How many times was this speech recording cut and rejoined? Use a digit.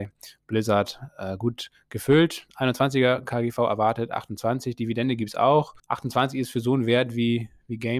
1